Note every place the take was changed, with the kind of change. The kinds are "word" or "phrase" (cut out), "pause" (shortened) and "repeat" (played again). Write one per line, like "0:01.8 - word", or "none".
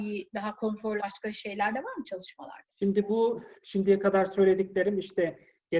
0:01.0 - phrase
0:02.7 - pause
0:03.6 - pause